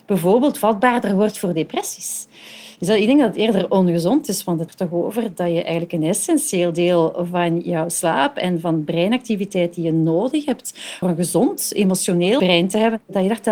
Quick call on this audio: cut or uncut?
cut